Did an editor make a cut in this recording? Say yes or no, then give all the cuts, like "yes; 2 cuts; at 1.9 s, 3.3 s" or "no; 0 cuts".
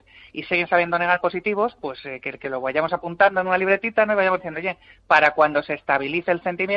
yes; 1 cut; at 1.2 s